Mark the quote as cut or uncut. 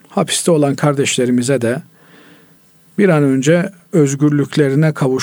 uncut